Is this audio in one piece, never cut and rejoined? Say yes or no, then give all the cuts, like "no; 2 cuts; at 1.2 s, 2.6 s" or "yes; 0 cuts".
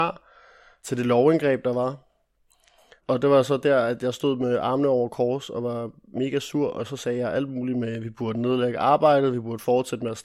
yes; 0 cuts